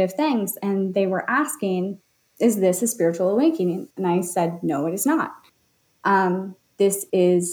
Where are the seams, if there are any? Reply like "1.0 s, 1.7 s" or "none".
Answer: none